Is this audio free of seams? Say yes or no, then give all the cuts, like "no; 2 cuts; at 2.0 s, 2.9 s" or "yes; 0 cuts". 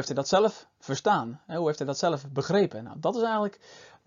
yes; 0 cuts